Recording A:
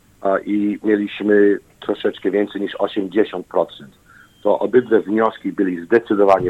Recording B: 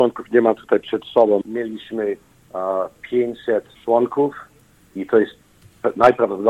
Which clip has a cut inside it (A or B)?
B